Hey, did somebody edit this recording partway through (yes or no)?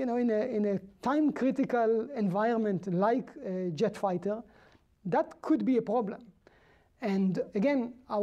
no